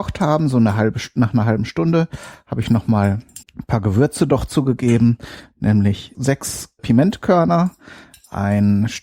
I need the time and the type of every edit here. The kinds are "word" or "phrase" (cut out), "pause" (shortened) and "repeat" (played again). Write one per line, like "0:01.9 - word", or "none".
0:03.4 - pause
0:06.1 - word
0:06.8 - word